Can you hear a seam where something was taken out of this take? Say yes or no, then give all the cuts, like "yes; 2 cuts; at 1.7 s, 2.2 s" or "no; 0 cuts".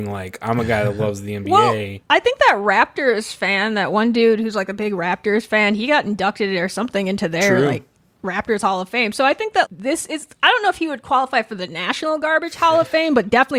yes; 2 cuts; at 2.0 s, 9.7 s